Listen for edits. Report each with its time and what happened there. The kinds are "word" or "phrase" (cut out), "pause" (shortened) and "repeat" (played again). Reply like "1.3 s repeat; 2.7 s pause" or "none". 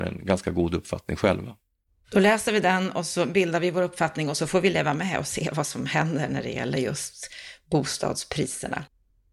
none